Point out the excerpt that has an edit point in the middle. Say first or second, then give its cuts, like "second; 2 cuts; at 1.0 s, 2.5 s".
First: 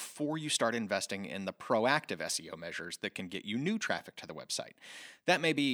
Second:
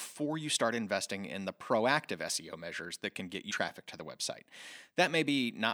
second; 1 cut; at 3.5 s